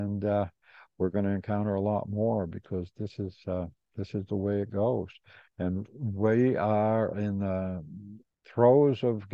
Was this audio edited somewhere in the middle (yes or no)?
no